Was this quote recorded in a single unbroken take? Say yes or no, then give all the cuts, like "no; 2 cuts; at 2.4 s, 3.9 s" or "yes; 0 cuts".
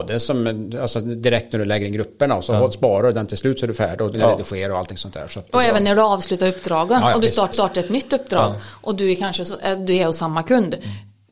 no; 2 cuts; at 4.1 s, 7.5 s